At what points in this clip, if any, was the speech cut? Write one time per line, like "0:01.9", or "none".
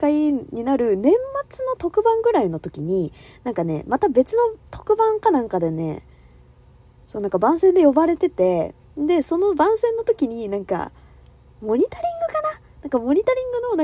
0:04.6
0:08.8